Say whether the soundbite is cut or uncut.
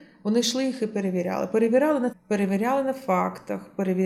cut